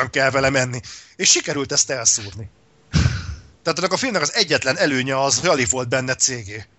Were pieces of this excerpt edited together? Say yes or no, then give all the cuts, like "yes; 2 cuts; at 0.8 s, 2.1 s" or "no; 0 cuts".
yes; 1 cut; at 5.4 s